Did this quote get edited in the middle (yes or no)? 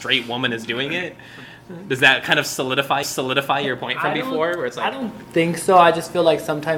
yes